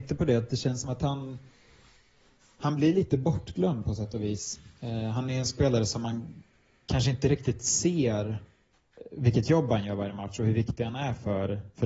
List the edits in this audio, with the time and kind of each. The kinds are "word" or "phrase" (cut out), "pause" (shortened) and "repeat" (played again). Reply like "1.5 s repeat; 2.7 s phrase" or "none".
4.8 s pause